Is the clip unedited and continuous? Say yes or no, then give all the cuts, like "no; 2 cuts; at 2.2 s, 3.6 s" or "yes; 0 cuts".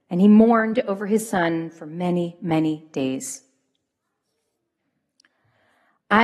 yes; 0 cuts